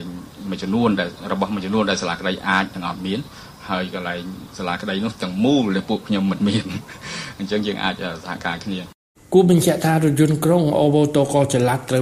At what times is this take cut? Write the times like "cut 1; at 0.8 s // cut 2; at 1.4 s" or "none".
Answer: cut 1; at 9.2 s